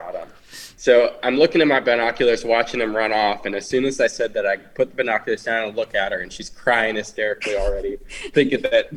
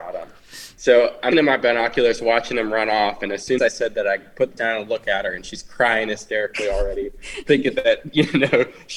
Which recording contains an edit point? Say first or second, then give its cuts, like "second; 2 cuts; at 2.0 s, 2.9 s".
second; 3 cuts; at 1.3 s, 3.6 s, 4.6 s